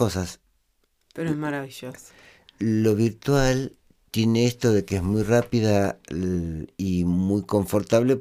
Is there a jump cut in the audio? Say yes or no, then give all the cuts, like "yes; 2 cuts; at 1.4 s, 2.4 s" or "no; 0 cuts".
no; 0 cuts